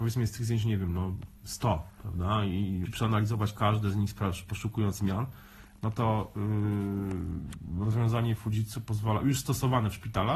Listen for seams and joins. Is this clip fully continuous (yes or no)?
no